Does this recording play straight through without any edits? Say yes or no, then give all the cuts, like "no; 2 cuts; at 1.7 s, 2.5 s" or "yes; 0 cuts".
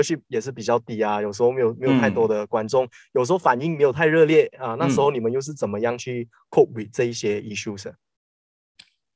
yes; 0 cuts